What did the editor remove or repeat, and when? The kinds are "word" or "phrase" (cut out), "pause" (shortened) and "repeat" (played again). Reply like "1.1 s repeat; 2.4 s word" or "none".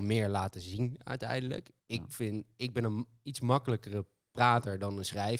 1.8 s pause